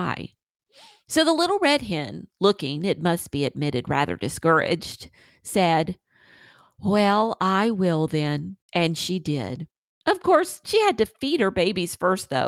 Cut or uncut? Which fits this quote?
cut